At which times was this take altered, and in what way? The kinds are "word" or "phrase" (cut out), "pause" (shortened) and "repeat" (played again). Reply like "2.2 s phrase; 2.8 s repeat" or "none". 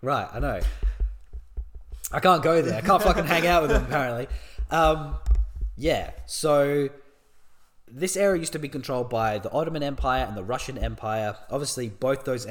none